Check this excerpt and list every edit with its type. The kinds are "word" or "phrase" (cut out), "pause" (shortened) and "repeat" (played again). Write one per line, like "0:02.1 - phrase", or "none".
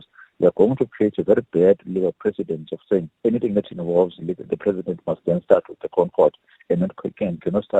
0:03.2 - pause